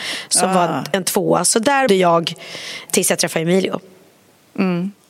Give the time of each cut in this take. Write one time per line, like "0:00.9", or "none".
0:01.9
0:02.9